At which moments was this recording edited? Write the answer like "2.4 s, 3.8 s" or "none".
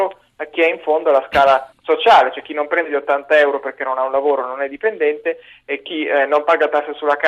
none